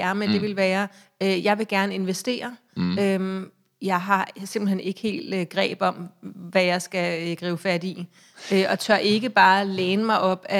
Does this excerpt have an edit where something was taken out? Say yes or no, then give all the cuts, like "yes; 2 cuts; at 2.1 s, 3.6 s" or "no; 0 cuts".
no; 0 cuts